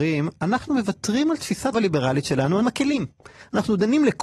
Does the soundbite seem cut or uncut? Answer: cut